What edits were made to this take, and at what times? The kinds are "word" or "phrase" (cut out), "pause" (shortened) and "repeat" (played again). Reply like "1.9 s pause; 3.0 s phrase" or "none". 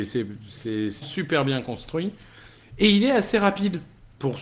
1.0 s word